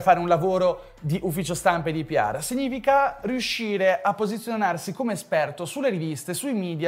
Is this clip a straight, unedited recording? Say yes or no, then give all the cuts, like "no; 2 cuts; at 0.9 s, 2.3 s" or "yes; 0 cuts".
yes; 0 cuts